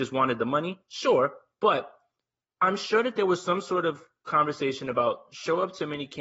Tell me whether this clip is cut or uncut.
uncut